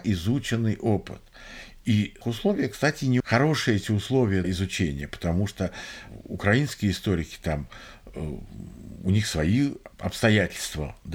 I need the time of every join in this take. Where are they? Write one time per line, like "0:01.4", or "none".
0:02.2
0:03.2
0:04.4
0:09.9